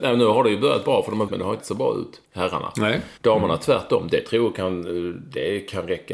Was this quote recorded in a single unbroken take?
no; 4 cuts; at 1.3 s, 1.6 s, 2.3 s, 3.2 s

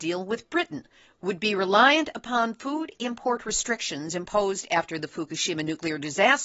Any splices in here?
no; 0 cuts

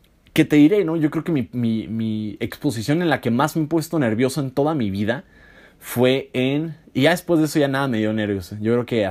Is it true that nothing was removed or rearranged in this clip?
yes; 0 cuts

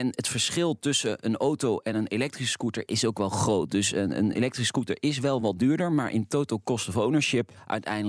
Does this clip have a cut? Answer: no; 0 cuts

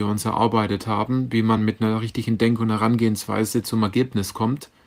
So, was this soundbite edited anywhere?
no; 0 cuts

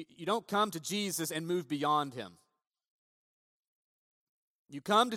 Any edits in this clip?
no; 0 cuts

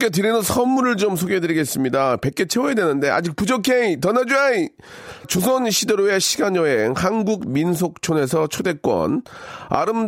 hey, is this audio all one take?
no; 1 cut; at 5.2 s

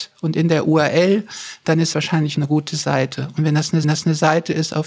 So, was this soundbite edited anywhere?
yes; 3 cuts; at 1.9 s, 2.3 s, 3.8 s

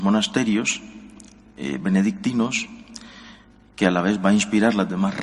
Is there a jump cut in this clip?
no; 0 cuts

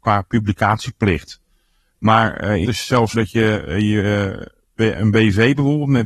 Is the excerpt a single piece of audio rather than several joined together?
no; 2 cuts; at 2.6 s, 3.1 s

